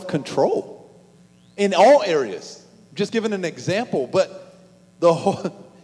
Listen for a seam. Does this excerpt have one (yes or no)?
no